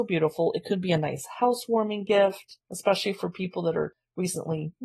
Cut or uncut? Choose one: cut